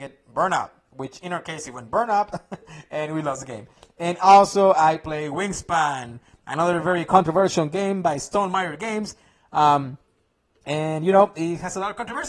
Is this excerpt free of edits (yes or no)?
yes